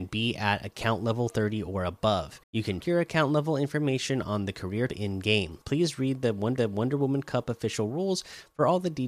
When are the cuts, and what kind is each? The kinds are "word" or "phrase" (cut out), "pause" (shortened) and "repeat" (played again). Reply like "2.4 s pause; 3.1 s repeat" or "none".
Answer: 2.4 s pause; 2.8 s word; 4.9 s word; 5.6 s pause; 6.6 s repeat